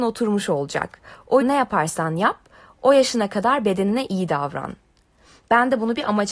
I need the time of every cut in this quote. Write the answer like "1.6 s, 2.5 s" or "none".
1.4 s